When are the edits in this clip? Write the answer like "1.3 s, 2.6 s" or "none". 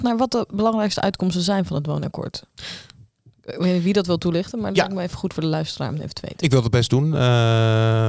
none